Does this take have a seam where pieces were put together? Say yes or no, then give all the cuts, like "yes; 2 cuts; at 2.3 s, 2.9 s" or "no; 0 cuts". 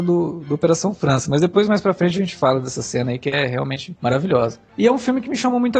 no; 0 cuts